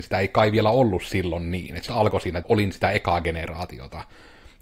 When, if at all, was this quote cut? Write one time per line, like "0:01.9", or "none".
0:01.9
0:02.4